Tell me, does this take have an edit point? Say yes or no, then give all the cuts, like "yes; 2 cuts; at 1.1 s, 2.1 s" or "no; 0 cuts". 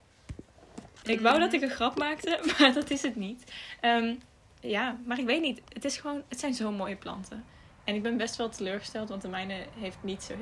no; 0 cuts